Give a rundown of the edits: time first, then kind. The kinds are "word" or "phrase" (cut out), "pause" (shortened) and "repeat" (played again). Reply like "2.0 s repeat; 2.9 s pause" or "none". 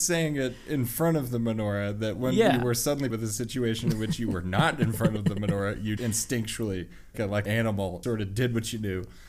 3.1 s word; 6.0 s word; 7.1 s word; 7.5 s word; 8.0 s word